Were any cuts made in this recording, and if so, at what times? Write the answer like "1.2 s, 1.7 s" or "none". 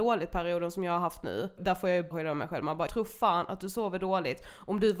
1.6 s, 2.1 s, 2.9 s